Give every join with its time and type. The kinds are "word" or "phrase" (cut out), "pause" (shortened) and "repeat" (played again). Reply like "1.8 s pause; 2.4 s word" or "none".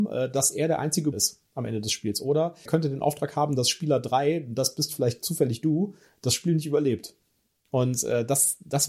1.1 s word; 2.7 s word

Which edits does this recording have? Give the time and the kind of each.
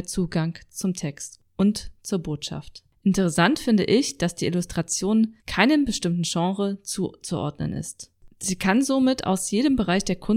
5.4 s pause

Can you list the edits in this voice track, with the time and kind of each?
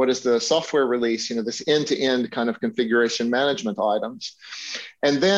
none

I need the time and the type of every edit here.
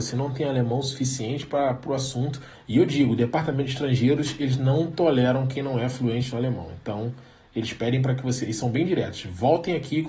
2.5 s pause

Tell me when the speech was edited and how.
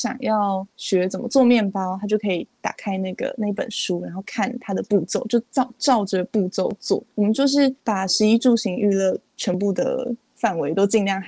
7.1 s pause; 7.8 s pause

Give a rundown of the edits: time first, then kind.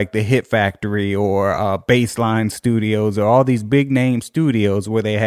none

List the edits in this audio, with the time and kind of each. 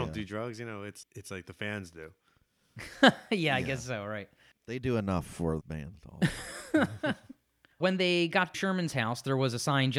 1.0 s word; 5.6 s word; 7.8 s word; 8.5 s word

